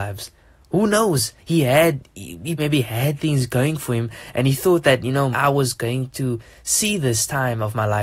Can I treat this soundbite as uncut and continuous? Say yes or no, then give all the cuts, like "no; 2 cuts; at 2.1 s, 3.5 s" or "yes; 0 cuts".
no; 3 cuts; at 1.4 s, 2.6 s, 5.3 s